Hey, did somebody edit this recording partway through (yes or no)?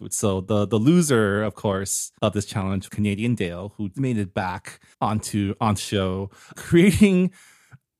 yes